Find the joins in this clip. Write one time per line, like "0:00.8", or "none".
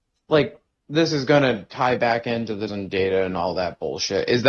0:02.7